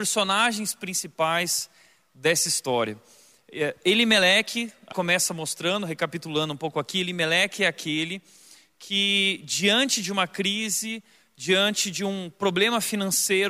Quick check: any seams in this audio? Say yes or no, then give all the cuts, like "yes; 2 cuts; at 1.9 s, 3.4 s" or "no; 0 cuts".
yes; 1 cut; at 4.9 s